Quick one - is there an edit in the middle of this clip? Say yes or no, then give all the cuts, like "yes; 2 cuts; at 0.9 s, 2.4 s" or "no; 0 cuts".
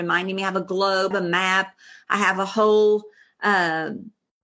yes; 1 cut; at 1.1 s